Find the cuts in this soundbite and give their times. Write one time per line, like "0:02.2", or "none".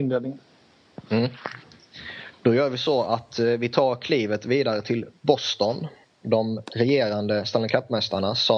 none